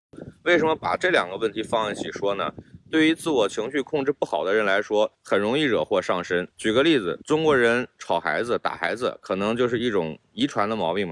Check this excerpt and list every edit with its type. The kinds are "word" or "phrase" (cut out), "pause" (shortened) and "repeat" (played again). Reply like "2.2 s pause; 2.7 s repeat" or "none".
5.1 s pause; 6.5 s pause; 7.2 s pause